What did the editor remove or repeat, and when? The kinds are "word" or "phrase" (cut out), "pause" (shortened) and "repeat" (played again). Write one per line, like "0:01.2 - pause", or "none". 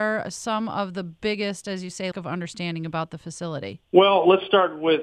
0:02.1 - word